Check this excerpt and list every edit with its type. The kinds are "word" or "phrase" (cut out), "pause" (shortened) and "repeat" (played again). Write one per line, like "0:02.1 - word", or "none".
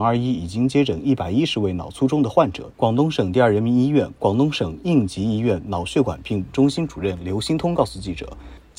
0:02.7 - pause

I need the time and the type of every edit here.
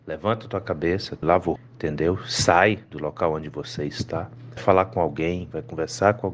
0:01.2 - phrase
0:01.6 - word
0:04.6 - word

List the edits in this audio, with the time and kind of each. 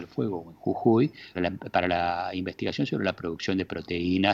0:01.3 - word

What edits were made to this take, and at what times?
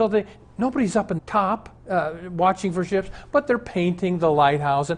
0:01.2 - word
0:01.8 - pause

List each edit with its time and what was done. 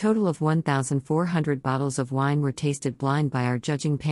none

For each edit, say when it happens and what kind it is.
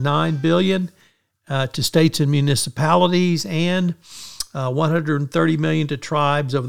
none

